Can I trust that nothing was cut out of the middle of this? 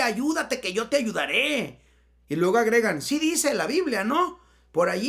yes; 0 cuts

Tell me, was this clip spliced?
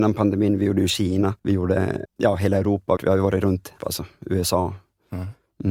yes; 4 cuts; at 1.4 s, 2.1 s, 3.0 s, 3.8 s

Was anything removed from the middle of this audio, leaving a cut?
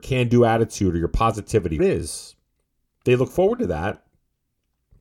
yes; 1 cut; at 1.8 s

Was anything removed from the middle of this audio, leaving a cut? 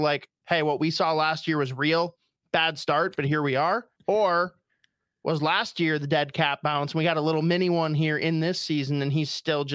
yes; 1 cut; at 4.0 s

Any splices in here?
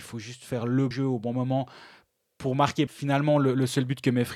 yes; 2 cuts; at 0.9 s, 2.9 s

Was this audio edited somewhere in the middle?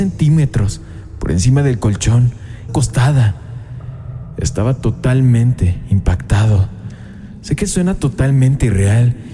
yes; 1 cut; at 2.7 s

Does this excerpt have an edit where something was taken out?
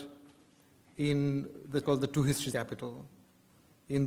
yes; 2 cuts; at 1.8 s, 2.5 s

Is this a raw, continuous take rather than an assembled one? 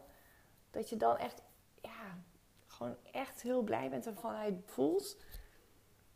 no; 3 cuts; at 1.6 s, 4.2 s, 4.7 s

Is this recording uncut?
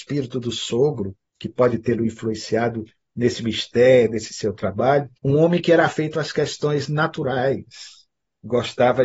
no; 3 cuts; at 1.3 s, 2.9 s, 5.2 s

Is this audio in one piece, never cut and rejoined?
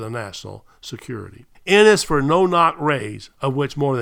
no; 1 cut; at 1.5 s

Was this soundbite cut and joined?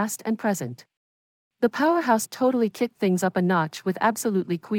yes; 2 cuts; at 1.4 s, 2.3 s

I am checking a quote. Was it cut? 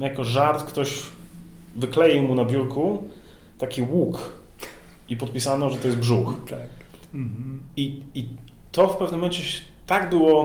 no; 0 cuts

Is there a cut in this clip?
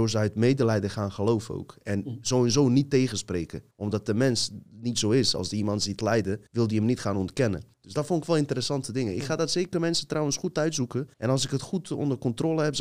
yes; 4 cuts; at 3.7 s, 6.5 s, 7.7 s, 11.1 s

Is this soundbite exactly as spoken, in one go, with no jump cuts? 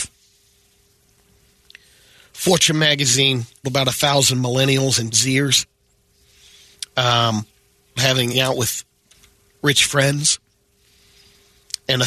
no; 4 cuts; at 3.6 s, 5.1 s, 8.0 s, 8.3 s

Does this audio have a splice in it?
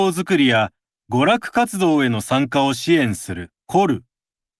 yes; 1 cut; at 3.6 s

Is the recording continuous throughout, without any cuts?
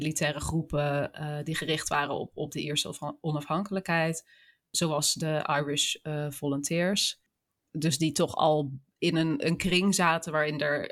yes; 0 cuts

